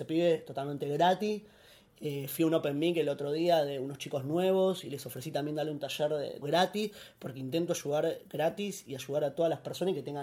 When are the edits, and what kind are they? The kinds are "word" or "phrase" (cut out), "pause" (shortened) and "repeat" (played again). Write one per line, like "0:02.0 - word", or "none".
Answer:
0:06.4 - word